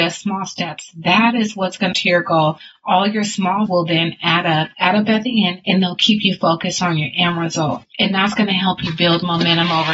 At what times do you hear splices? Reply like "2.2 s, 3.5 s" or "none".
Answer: 1.9 s, 3.7 s, 4.7 s